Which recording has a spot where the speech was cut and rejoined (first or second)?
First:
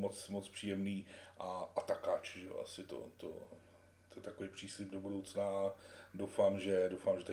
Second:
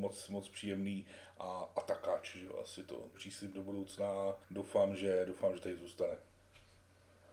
second